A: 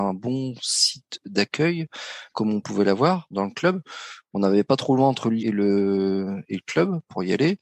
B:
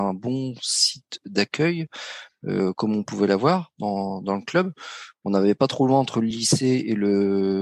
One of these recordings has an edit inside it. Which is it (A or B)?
A